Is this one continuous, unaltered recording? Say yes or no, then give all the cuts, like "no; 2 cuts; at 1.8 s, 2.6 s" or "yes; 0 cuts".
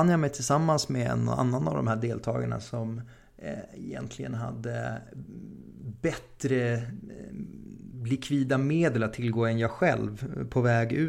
yes; 0 cuts